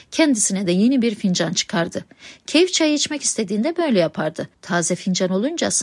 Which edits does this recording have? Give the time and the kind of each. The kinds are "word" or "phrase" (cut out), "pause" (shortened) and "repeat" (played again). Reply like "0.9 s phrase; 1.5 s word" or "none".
4.5 s pause